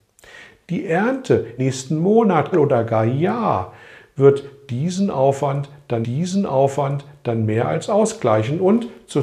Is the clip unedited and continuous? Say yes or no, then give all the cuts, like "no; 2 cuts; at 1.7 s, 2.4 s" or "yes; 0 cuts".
no; 3 cuts; at 1.6 s, 2.5 s, 6.0 s